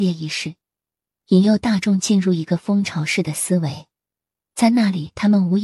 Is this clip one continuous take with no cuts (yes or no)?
yes